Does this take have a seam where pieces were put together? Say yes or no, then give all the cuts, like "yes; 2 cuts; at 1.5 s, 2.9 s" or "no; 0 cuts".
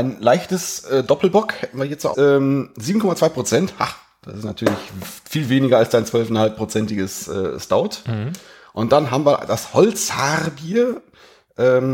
yes; 1 cut; at 2.1 s